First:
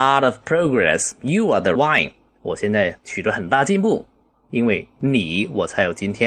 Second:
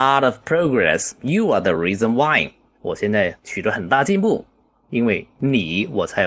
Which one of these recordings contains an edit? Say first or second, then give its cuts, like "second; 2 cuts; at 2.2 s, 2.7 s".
first; 1 cut; at 1.8 s